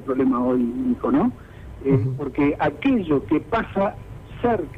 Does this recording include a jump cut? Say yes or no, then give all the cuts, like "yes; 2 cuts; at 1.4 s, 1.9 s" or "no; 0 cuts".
no; 0 cuts